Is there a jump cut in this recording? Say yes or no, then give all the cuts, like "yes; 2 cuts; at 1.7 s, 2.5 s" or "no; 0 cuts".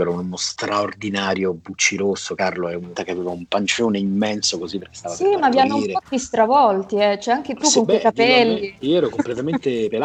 yes; 1 cut; at 3.0 s